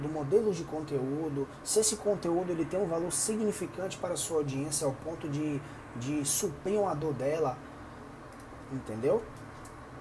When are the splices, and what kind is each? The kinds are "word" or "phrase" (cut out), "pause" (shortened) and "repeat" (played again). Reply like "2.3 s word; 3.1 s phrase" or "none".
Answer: none